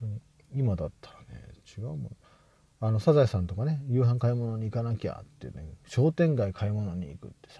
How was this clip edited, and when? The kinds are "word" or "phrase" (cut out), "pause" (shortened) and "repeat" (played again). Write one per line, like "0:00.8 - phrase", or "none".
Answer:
none